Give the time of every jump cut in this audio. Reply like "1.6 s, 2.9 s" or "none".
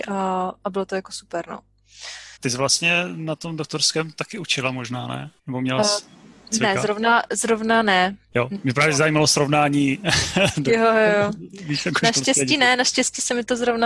2.4 s, 5.4 s, 8.2 s